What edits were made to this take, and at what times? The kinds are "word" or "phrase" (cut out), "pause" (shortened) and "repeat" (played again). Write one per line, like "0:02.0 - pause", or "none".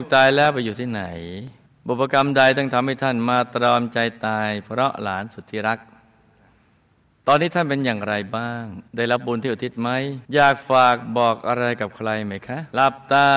0:01.7 - pause
0:08.9 - pause
0:10.2 - pause